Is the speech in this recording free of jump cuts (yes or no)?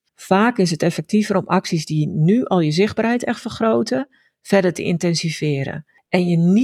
yes